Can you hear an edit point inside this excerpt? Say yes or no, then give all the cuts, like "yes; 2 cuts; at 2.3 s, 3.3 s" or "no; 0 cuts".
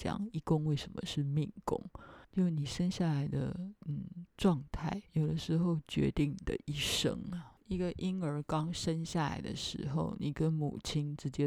yes; 4 cuts; at 2.2 s, 3.8 s, 5.1 s, 7.6 s